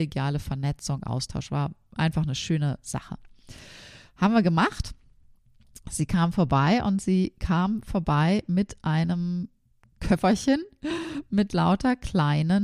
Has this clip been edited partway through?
no; 0 cuts

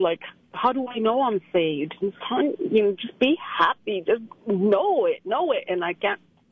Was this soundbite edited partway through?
yes; 1 cut; at 2.2 s

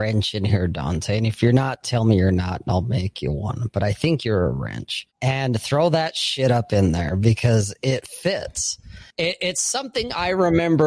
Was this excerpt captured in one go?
no; 1 cut; at 9.1 s

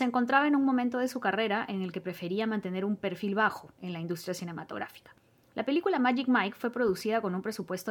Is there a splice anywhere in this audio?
no; 0 cuts

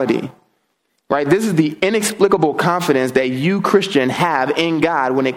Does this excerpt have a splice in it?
no; 0 cuts

